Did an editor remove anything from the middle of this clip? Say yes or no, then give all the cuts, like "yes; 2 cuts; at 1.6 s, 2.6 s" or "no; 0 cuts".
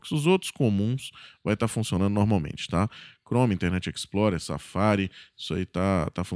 no; 0 cuts